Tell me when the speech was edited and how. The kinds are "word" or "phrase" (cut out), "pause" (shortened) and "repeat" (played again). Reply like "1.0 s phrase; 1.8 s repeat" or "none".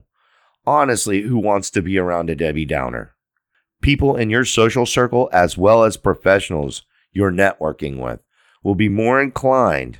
none

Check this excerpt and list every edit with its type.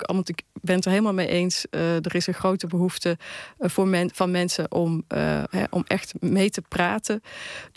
none

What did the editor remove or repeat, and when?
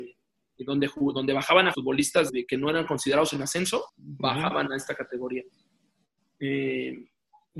1.7 s phrase; 2.3 s word; 3.9 s pause

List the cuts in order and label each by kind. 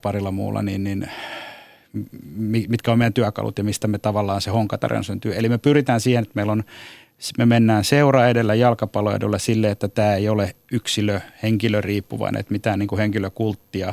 none

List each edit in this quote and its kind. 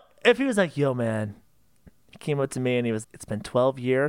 3.0 s word

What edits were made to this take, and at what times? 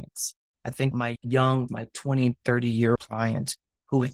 0.9 s word; 1.7 s word; 3.0 s word

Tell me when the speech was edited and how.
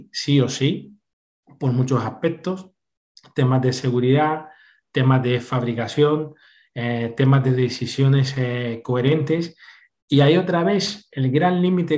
none

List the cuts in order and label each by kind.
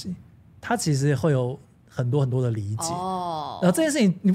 1.8 s pause

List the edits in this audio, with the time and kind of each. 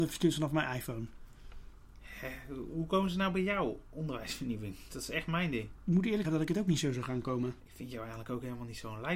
6.2 s word

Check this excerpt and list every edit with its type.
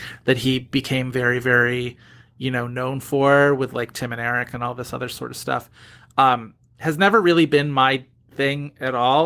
none

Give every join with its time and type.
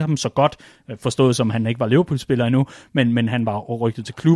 none

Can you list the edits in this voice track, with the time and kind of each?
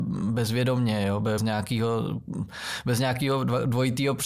1.4 s word

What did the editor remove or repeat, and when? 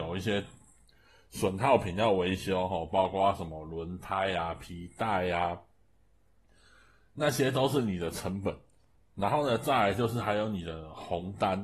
9.0 s pause

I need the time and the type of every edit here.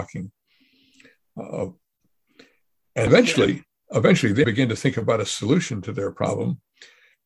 3.1 s word; 4.4 s word

